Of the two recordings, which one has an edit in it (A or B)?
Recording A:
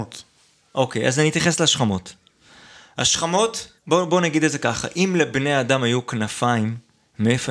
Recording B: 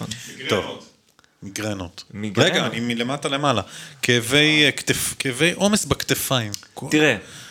A